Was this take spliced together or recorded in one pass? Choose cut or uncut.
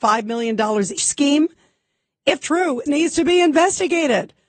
cut